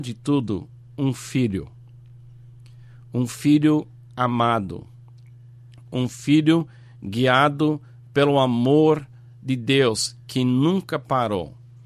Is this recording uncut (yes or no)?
yes